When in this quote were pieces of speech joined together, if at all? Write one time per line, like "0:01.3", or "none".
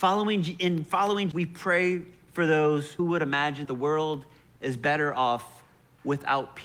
0:01.3
0:03.0
0:03.6